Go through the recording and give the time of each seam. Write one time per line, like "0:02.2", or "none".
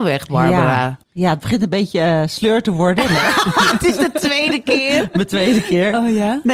0:01.0